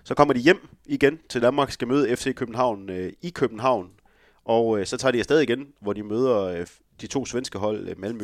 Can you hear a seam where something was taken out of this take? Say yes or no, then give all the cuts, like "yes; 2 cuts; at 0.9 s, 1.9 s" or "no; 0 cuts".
no; 0 cuts